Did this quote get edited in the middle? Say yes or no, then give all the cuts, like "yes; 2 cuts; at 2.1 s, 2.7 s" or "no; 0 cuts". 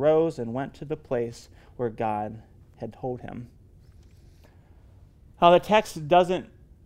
no; 0 cuts